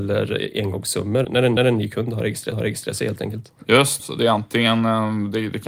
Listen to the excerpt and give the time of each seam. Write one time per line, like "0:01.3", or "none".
0:01.2
0:01.6
0:02.5
0:04.0